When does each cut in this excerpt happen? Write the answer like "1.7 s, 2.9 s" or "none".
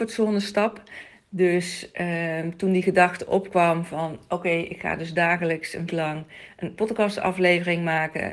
5.9 s